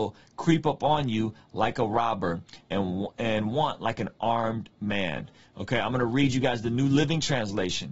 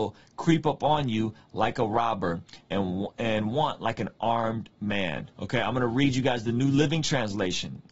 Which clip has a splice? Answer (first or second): second